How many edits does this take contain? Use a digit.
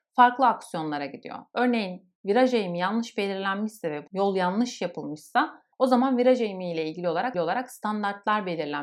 3